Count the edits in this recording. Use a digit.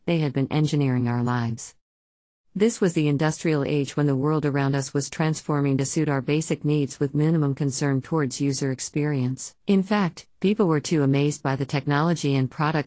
1